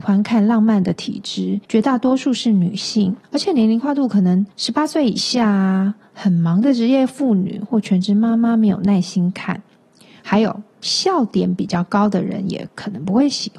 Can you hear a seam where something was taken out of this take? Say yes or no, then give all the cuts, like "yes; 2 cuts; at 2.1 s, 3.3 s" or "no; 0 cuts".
yes; 3 cuts; at 1.6 s, 3.2 s, 4.5 s